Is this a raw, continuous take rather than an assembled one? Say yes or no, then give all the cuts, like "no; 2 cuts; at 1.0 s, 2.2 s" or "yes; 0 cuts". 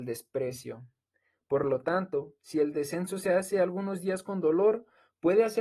yes; 0 cuts